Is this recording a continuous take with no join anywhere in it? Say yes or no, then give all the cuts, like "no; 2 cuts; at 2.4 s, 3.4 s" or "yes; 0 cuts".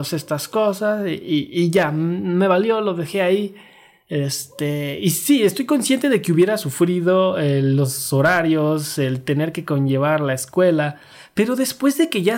yes; 0 cuts